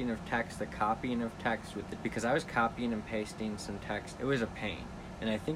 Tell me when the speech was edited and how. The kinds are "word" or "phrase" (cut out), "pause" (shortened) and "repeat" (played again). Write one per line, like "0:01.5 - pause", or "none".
0:02.0 - word
0:04.2 - word

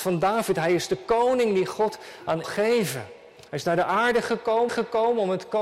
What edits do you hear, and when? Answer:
0:02.4 - phrase
0:04.7 - repeat

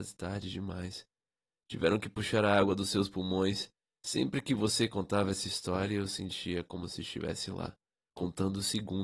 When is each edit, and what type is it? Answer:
none

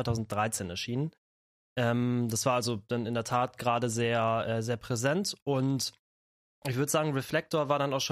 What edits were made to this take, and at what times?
none

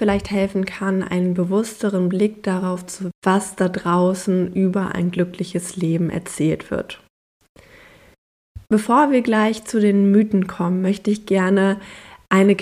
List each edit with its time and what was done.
0:03.1 - word
0:08.6 - pause

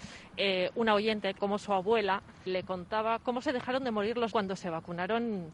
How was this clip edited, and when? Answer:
0:01.4 - word
0:02.5 - word
0:04.3 - word

